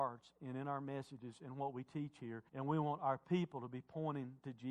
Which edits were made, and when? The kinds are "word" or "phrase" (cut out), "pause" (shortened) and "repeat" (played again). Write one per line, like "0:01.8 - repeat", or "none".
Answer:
0:02.5 - pause